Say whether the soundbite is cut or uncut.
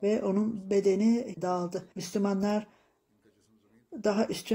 cut